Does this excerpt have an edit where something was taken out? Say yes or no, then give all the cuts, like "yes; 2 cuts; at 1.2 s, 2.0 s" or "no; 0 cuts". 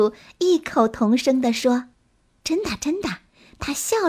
yes; 1 cut; at 1.9 s